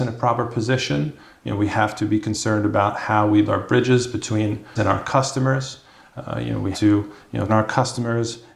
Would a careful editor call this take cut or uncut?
cut